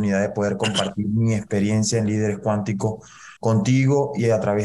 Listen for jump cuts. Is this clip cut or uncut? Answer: cut